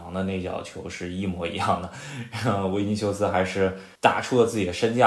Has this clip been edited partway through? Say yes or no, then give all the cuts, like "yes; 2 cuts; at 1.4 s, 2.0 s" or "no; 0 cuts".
yes; 1 cut; at 3.9 s